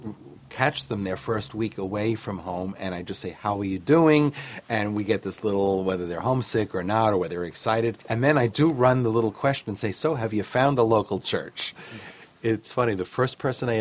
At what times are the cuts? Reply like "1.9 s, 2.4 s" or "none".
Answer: 8.0 s